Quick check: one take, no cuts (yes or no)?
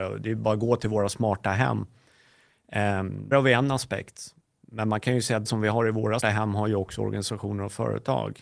no